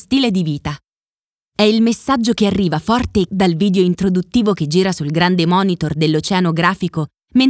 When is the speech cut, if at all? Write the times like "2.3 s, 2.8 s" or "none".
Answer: 3.3 s

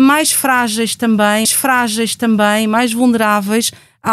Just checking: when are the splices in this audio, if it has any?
1.4 s

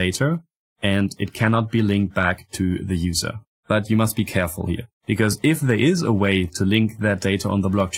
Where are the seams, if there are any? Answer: 3.5 s, 4.9 s

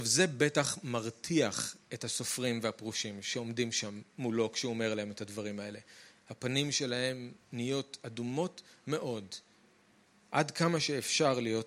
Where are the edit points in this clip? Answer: none

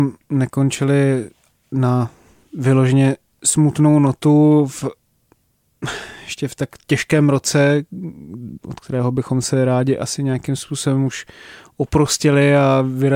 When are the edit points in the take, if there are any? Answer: none

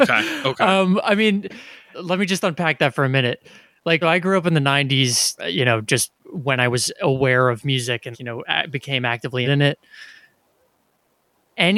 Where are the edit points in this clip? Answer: 1.9 s, 4.0 s, 5.4 s, 6.2 s, 8.1 s, 9.4 s

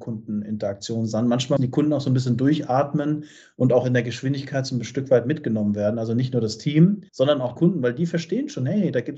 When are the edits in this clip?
1.6 s, 7.1 s, 7.6 s

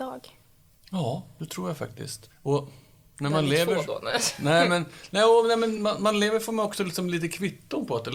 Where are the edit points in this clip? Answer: none

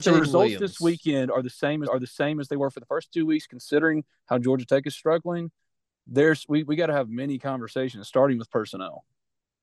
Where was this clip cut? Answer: 1.9 s

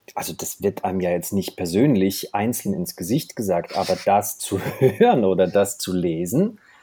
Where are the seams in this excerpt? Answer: none

